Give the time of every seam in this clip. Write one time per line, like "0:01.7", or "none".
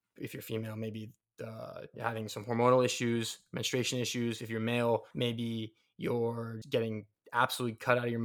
0:05.1
0:06.6